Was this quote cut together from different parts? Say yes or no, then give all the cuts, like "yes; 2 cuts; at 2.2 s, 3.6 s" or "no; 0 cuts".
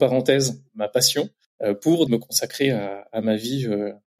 yes; 2 cuts; at 1.4 s, 2.1 s